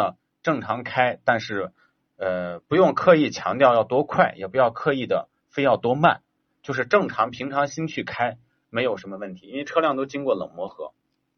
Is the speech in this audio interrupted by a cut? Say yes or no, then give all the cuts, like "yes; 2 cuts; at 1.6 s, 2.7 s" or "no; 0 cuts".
no; 0 cuts